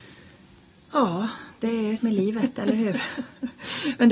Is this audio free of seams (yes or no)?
no